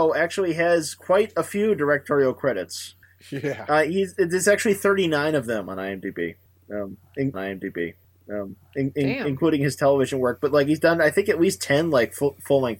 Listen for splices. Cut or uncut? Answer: cut